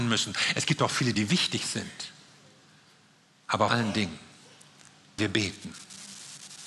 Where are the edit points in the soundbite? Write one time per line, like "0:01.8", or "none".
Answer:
0:01.1
0:03.7
0:05.2